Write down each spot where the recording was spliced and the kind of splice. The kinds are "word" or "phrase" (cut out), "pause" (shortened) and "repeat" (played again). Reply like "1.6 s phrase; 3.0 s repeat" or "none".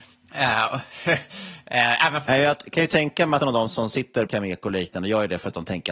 3.4 s word; 4.3 s word

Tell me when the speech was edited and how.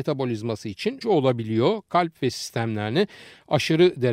1.0 s word; 2.3 s word

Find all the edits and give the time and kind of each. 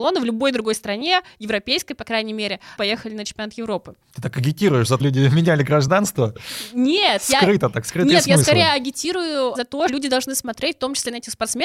2.8 s phrase; 4.0 s pause; 5.0 s word; 9.5 s word; 9.9 s word

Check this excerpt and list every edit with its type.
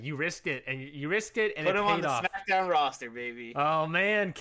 none

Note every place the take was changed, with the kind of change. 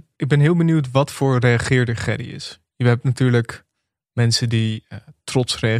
none

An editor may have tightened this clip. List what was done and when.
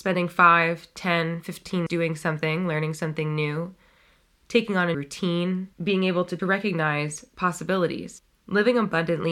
1.9 s word; 4.9 s word; 5.7 s pause; 6.4 s phrase

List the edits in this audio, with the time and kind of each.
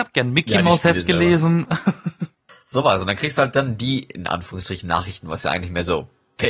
none

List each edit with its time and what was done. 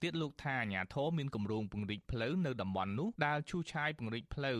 3.2 s pause

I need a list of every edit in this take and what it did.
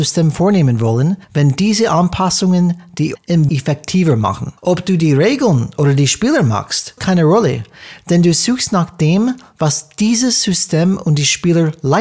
1.2 s pause; 3.1 s word; 3.5 s word; 4.6 s pause; 7.0 s word

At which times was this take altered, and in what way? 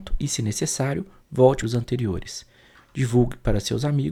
1.6 s phrase

